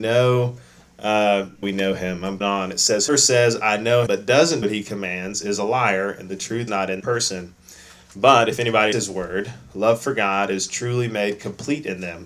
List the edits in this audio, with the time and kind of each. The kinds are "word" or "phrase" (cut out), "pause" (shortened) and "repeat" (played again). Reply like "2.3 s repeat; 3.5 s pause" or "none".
1.6 s word; 2.4 s word; 3.1 s word; 4.1 s word; 4.6 s word; 6.7 s word; 7.0 s word; 8.9 s word